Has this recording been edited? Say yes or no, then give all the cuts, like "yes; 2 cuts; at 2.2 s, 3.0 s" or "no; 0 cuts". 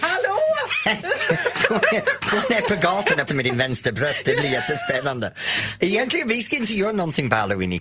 yes; 1 cut; at 3.3 s